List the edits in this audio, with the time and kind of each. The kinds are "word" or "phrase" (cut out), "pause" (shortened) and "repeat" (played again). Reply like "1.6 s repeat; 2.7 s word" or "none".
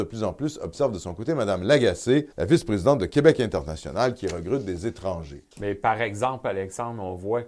2.3 s pause; 5.5 s pause